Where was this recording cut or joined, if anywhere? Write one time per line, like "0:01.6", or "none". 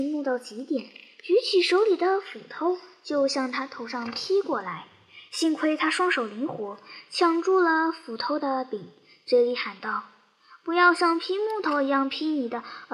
none